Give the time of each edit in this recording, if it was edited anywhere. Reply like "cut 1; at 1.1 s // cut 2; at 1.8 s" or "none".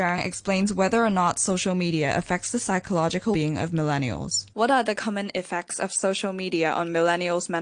cut 1; at 3.3 s // cut 2; at 4.5 s